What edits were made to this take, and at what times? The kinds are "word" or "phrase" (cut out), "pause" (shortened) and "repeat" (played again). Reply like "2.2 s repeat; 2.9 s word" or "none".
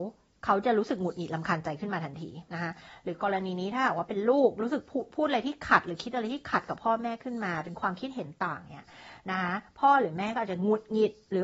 2.5 s pause